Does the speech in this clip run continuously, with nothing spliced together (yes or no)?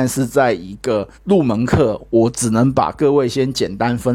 no